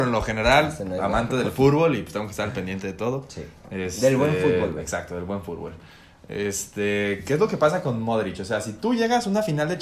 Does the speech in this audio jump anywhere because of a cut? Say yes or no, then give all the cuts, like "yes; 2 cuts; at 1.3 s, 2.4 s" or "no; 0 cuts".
no; 0 cuts